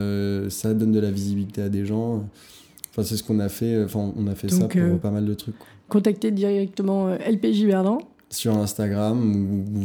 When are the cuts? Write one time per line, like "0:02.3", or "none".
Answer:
none